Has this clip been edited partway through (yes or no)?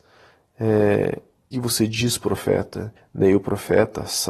yes